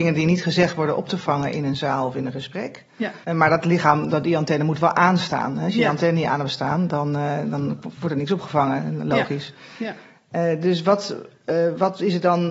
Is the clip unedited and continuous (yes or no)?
no